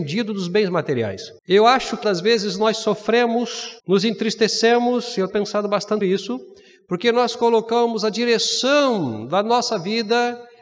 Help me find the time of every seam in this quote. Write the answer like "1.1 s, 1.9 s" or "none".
1.4 s, 2.0 s, 3.8 s, 5.3 s, 6.0 s